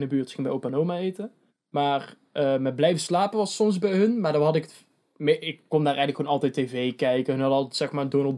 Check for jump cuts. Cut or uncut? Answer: cut